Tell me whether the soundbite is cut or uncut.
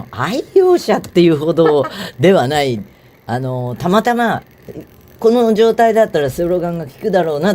uncut